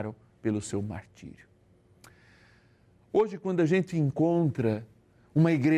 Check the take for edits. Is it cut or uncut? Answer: uncut